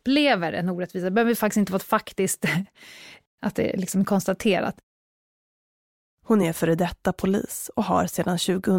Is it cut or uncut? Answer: uncut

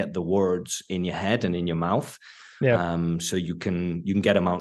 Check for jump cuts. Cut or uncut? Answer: uncut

